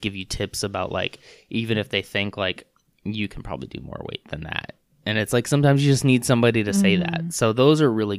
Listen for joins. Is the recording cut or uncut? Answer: uncut